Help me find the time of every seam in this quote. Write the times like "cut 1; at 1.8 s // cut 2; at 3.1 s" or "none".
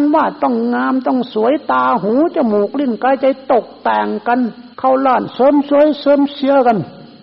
cut 1; at 4.7 s